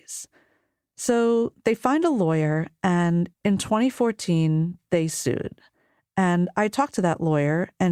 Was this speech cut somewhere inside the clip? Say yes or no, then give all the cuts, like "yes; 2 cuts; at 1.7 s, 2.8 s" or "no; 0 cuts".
yes; 1 cut; at 3.3 s